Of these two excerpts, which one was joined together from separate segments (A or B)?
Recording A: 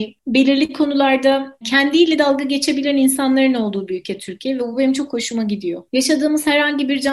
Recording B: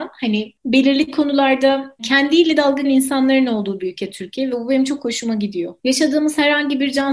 B